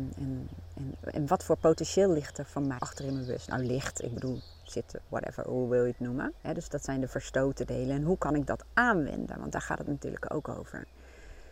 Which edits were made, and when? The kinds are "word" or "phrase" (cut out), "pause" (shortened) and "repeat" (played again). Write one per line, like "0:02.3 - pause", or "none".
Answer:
0:01.0 - word
0:02.8 - word
0:05.1 - word
0:06.4 - pause